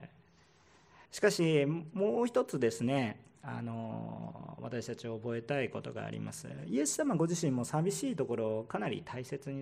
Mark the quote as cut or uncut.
cut